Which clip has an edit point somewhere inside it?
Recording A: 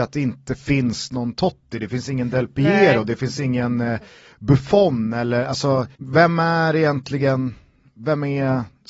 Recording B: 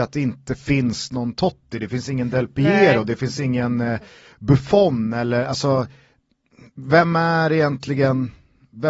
A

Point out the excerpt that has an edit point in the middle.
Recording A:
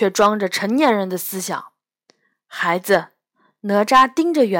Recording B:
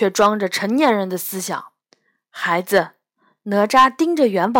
B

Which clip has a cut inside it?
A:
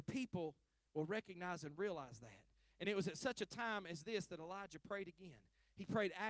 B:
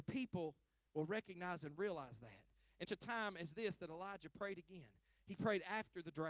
B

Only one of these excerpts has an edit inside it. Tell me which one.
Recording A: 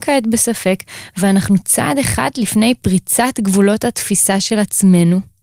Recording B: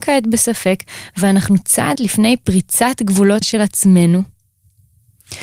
B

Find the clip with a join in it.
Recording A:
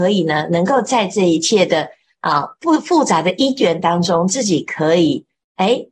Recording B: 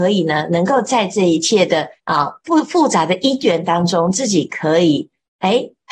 B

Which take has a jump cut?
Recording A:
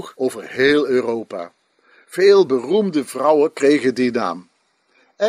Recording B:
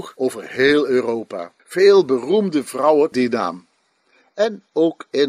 B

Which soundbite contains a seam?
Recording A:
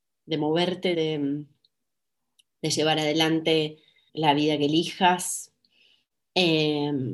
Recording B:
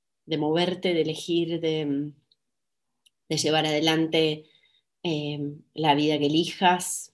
A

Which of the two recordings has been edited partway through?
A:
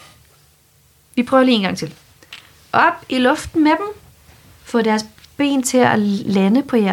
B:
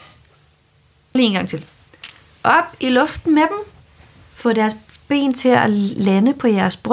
B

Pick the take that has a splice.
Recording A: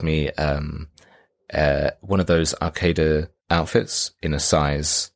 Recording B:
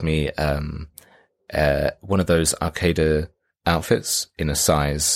A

